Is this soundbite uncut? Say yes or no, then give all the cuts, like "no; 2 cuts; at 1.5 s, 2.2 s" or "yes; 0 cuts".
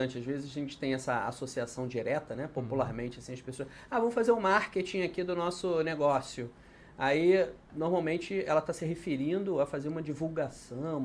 yes; 0 cuts